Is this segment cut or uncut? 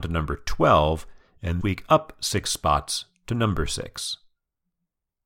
cut